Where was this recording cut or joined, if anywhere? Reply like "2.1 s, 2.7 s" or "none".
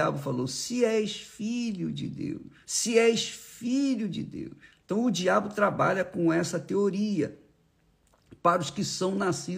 2.6 s, 4.8 s